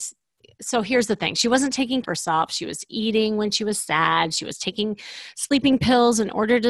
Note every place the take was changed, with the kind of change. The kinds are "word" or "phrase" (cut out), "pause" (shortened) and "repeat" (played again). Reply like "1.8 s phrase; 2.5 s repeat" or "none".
2.0 s word